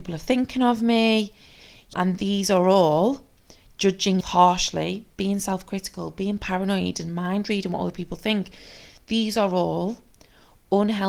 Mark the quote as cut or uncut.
cut